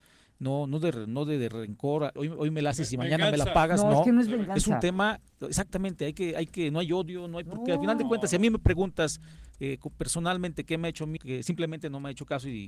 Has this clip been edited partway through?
yes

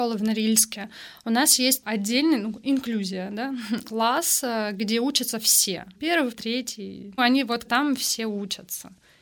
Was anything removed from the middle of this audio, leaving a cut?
yes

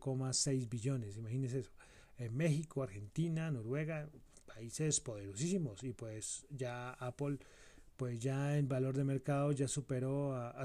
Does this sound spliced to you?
no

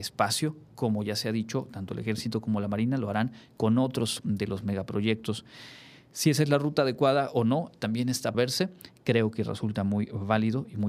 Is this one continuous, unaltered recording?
no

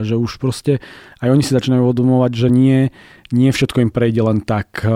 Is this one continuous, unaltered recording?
yes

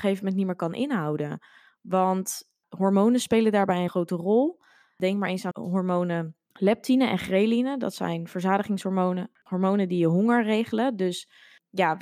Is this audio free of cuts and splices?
no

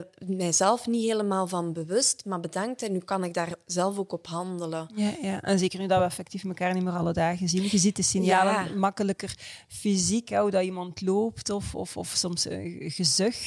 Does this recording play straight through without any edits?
yes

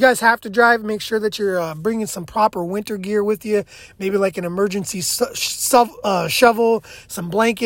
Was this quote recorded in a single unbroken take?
yes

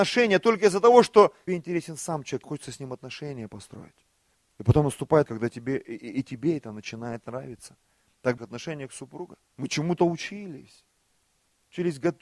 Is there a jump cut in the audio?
yes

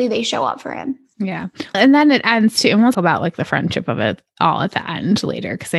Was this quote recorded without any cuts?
no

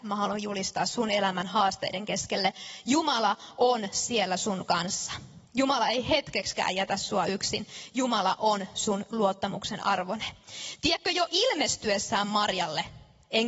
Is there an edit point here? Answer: no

